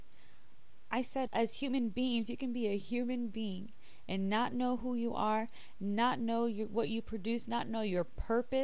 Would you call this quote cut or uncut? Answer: cut